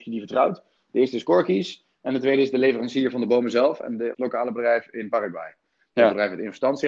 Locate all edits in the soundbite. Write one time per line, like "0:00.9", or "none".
0:04.1